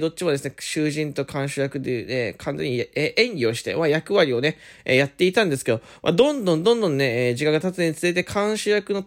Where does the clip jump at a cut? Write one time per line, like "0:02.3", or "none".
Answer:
none